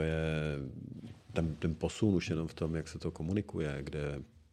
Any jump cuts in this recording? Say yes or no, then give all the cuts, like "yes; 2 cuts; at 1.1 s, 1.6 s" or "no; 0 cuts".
no; 0 cuts